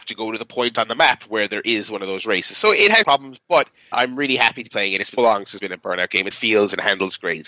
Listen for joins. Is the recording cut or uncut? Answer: cut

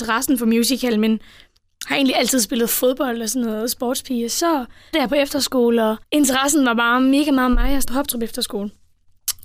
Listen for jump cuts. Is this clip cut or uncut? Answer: cut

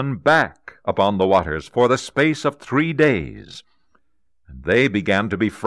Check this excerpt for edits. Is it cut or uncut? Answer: uncut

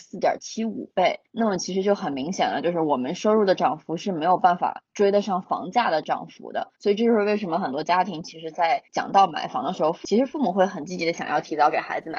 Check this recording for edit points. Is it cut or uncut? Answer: cut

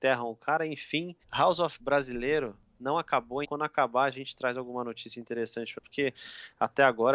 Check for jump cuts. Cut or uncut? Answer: cut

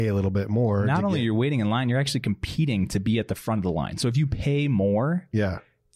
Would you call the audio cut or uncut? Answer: uncut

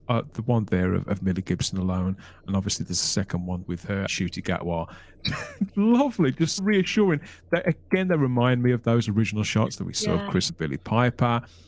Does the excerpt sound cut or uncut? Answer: cut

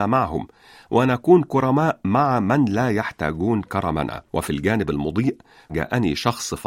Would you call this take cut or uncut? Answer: cut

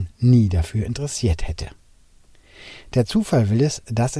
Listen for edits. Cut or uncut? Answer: uncut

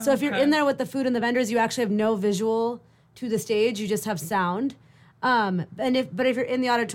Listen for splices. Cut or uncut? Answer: uncut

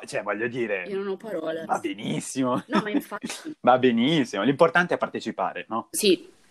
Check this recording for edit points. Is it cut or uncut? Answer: uncut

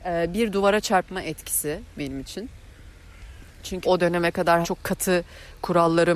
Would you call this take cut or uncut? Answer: cut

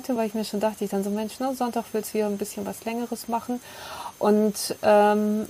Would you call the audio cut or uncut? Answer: uncut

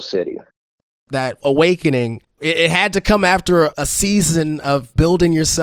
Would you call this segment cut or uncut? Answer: cut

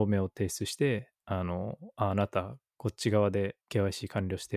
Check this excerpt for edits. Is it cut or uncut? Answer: cut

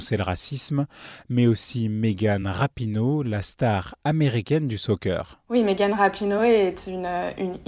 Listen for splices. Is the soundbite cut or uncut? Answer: uncut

